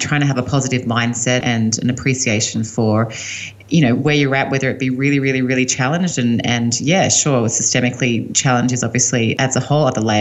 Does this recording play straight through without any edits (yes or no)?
no